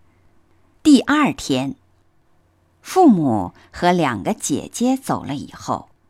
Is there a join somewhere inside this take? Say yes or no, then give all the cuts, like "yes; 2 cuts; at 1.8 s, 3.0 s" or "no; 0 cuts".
no; 0 cuts